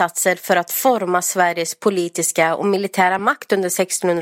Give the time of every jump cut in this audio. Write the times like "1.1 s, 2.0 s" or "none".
none